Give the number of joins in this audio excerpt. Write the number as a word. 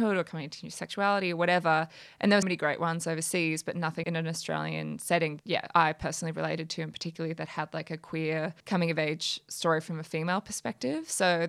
four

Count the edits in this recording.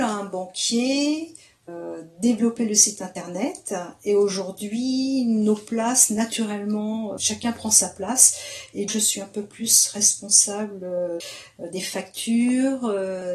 two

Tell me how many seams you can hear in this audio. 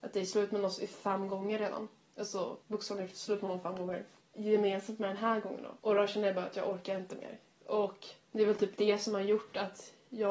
four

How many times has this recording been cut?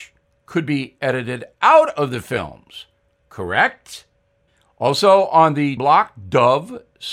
one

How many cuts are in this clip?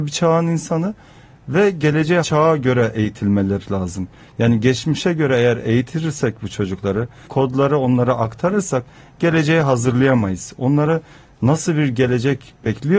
two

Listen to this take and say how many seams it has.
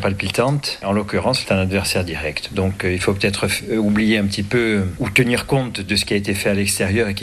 one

